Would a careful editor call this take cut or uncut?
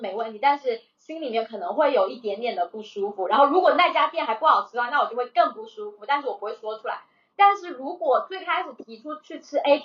uncut